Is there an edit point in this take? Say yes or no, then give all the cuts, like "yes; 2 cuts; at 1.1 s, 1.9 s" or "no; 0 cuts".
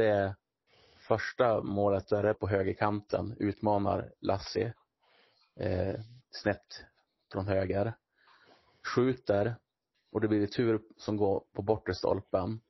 yes; 1 cut; at 2.3 s